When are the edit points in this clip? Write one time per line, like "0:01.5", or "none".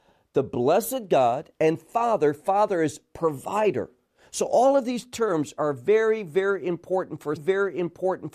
0:07.4